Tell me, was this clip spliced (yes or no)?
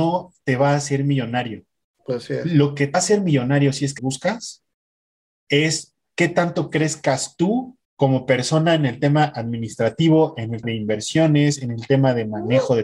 yes